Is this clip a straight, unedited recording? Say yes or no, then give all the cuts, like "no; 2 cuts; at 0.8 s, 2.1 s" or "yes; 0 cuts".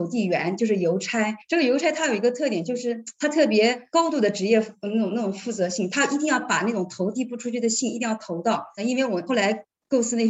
no; 1 cut; at 1.4 s